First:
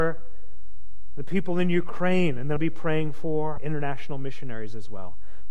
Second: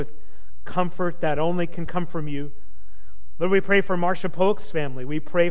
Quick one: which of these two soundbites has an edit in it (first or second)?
first